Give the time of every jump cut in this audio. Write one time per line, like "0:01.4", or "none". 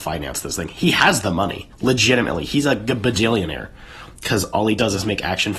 0:01.7